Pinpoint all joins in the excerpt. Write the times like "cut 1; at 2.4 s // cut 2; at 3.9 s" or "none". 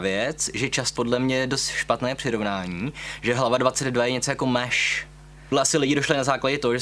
cut 1; at 1.0 s // cut 2; at 5.5 s

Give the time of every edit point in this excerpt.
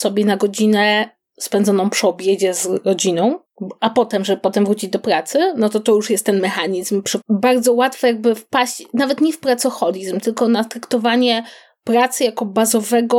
cut 1; at 7.2 s

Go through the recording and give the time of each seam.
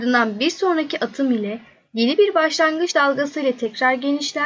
none

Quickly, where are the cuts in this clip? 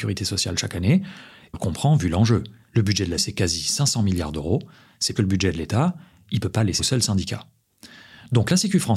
cut 1; at 1.5 s // cut 2; at 3.2 s // cut 3; at 5.1 s // cut 4; at 6.8 s

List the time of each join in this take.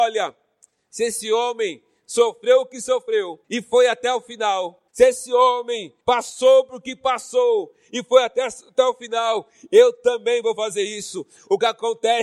cut 1; at 3.4 s // cut 2; at 4.9 s // cut 3; at 6.0 s

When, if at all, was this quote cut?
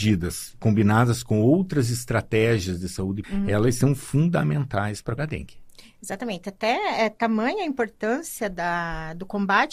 cut 1; at 3.2 s // cut 2; at 5.2 s

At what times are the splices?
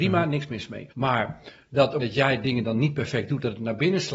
cut 1; at 0.9 s // cut 2; at 2.0 s

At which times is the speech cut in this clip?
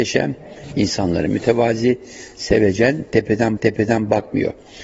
cut 1; at 3.6 s

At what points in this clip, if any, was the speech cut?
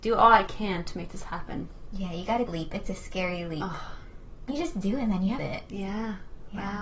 cut 1; at 2.5 s // cut 2; at 4.5 s // cut 3; at 5.4 s

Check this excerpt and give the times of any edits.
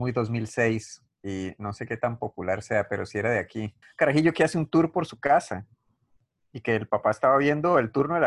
cut 1; at 3.8 s // cut 2; at 6.2 s

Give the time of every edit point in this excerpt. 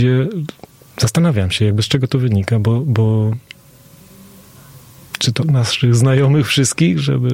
cut 1; at 5.4 s

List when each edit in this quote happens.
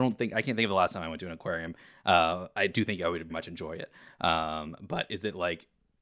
cut 1; at 3.3 s

